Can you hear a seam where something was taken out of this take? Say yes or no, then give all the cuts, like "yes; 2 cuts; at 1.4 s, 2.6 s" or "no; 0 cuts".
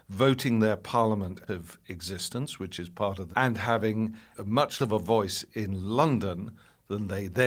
yes; 4 cuts; at 1.5 s, 3.3 s, 4.3 s, 4.8 s